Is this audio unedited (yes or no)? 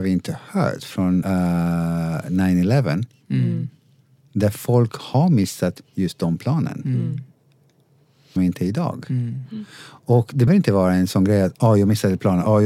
no